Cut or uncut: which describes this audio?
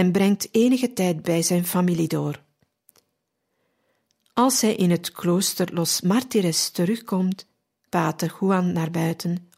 cut